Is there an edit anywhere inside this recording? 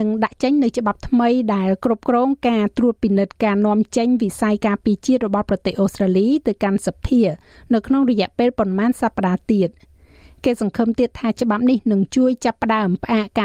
no; 0 cuts

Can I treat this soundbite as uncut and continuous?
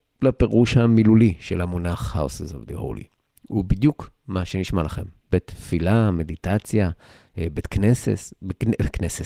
yes; 0 cuts

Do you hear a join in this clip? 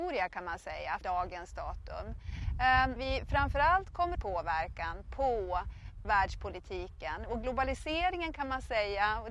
yes; 4 cuts; at 1.0 s, 3.0 s, 4.1 s, 6.0 s

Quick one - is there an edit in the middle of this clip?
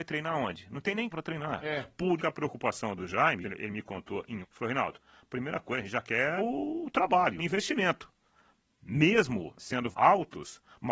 yes; 9 cuts; at 1.1 s, 2.2 s, 3.0 s, 3.4 s, 4.4 s, 6.4 s, 7.4 s, 9.6 s, 9.9 s

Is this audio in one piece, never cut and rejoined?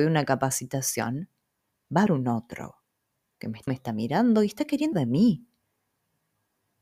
no; 3 cuts; at 2.1 s, 3.7 s, 4.9 s

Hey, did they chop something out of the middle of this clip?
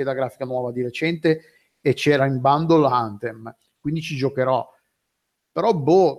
no; 0 cuts

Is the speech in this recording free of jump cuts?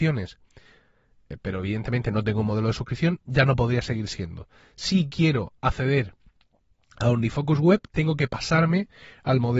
yes; 0 cuts

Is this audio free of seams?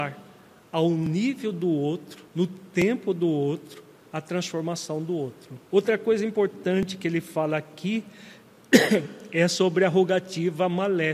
no; 2 cuts; at 2.3 s, 5.7 s

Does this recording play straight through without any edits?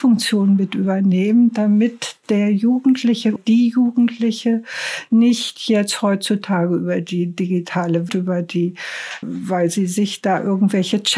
no; 3 cuts; at 3.4 s, 8.1 s, 9.2 s

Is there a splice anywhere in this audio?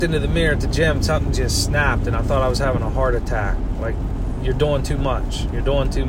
no; 0 cuts

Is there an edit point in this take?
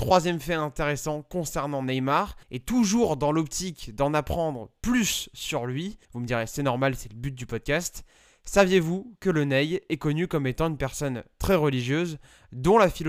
yes; 2 cuts; at 2.4 s, 6.0 s

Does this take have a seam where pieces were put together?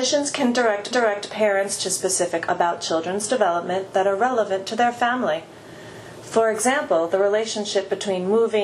yes; 2 cuts; at 0.9 s, 2.5 s

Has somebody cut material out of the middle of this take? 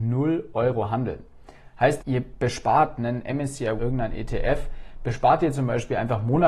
yes; 2 cuts; at 2.0 s, 3.8 s

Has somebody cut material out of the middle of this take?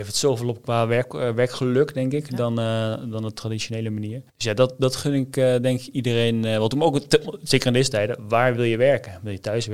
yes; 1 cut; at 4.3 s

